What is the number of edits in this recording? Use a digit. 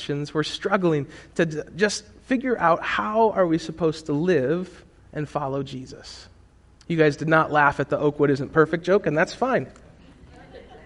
1